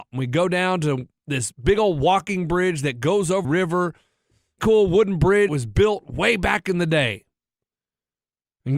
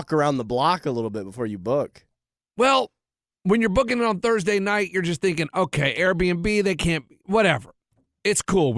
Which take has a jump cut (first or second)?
first